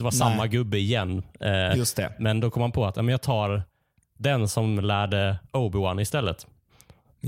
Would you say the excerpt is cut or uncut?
uncut